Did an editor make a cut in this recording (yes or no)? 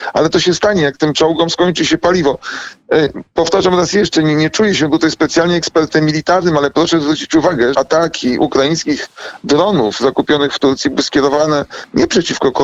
yes